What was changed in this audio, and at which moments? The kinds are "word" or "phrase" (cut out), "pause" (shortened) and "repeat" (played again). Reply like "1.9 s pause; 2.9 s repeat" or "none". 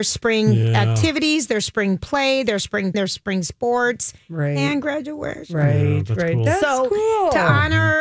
2.9 s word